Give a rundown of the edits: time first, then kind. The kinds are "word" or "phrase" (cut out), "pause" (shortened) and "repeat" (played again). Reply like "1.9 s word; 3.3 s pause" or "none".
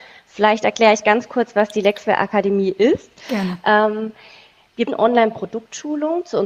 4.9 s word